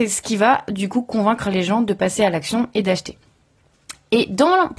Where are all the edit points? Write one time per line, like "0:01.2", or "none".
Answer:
none